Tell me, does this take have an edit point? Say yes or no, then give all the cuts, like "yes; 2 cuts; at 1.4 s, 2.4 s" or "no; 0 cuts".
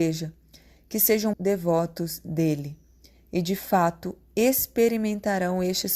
yes; 1 cut; at 1.3 s